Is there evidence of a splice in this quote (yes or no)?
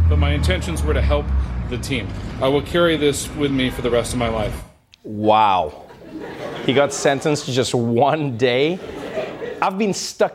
no